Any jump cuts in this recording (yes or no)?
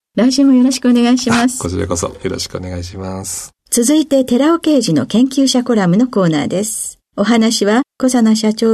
yes